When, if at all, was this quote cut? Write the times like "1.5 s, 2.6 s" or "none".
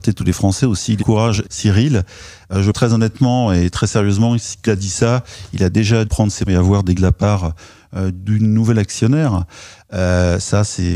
1.0 s, 1.4 s, 2.7 s, 4.6 s, 6.0 s, 6.5 s, 7.0 s